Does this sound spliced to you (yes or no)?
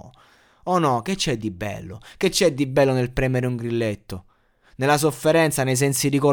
no